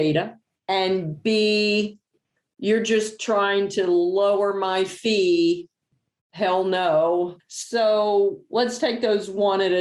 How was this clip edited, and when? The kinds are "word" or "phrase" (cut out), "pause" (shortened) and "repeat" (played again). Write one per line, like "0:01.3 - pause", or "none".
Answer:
none